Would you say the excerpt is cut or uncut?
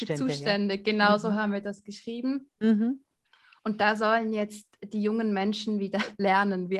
uncut